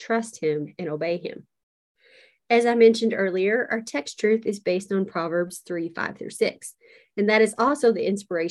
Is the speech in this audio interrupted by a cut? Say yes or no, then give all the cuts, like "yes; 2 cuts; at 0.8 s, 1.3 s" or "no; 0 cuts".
no; 0 cuts